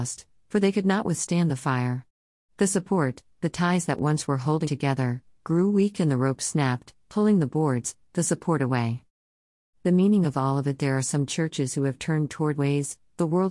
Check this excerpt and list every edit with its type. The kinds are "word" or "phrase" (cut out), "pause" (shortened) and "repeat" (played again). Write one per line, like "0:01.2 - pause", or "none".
0:04.6 - word
0:12.5 - word